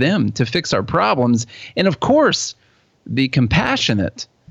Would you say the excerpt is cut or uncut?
uncut